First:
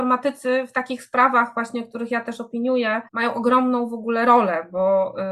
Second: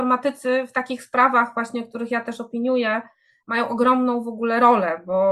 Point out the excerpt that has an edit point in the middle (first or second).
first